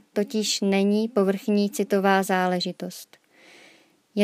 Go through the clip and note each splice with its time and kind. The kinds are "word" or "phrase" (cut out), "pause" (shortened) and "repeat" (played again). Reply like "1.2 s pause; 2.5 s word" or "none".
none